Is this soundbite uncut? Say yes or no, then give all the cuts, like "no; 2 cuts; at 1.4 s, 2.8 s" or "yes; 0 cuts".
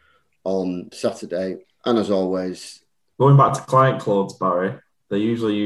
no; 3 cuts; at 0.9 s, 1.6 s, 3.1 s